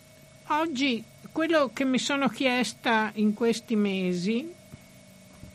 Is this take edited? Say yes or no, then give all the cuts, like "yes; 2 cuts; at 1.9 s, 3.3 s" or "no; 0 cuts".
no; 0 cuts